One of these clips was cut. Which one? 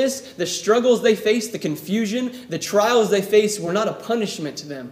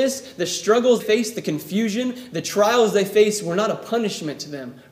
second; 1 cut; at 1.0 s

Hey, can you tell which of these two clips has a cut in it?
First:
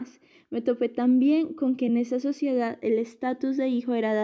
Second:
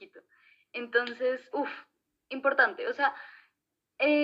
second; 1 cut; at 1.5 s

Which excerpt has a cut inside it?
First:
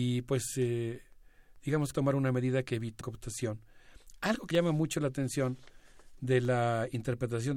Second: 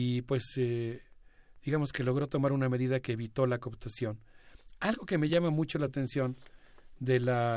first; 3 cuts; at 1.9 s, 3.0 s, 4.5 s

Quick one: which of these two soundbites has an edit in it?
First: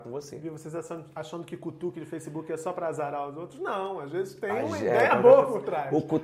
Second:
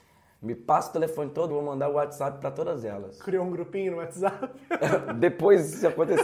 second; 1 cut; at 1.5 s

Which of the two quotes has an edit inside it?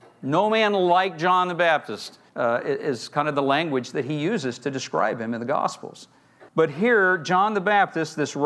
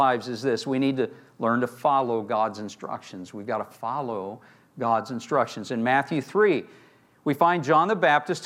first; 2 cuts; at 2.3 s, 6.5 s

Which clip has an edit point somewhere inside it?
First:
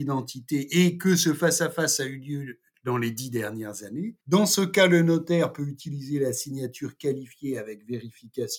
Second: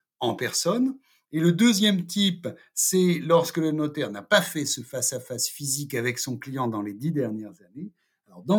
first; 1 cut; at 4.2 s

